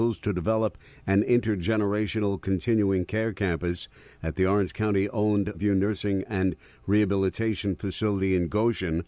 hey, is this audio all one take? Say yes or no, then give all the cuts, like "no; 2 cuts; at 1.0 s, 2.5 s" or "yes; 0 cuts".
no; 1 cut; at 5.5 s